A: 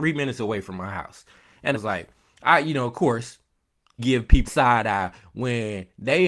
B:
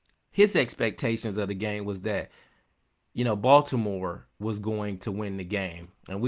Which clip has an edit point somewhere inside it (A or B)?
A